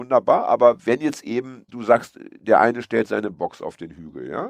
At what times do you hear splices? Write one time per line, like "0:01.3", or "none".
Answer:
0:01.7